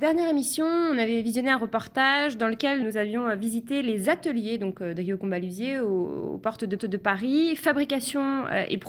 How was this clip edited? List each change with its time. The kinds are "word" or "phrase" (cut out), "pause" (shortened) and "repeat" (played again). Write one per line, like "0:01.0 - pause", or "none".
0:02.8 - word
0:06.8 - repeat